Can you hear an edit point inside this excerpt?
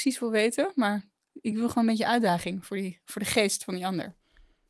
no; 0 cuts

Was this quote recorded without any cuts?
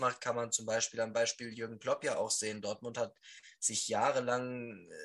yes; 0 cuts

